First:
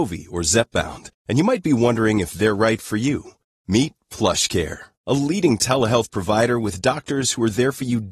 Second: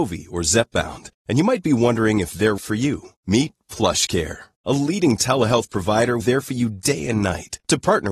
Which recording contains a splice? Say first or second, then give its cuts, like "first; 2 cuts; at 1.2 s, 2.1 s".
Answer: second; 3 cuts; at 2.6 s, 3.1 s, 6.2 s